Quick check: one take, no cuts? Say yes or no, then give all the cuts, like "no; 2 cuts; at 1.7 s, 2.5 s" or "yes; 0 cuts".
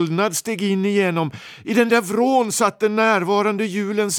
yes; 0 cuts